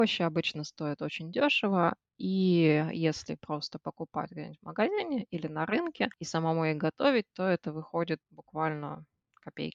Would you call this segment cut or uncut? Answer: uncut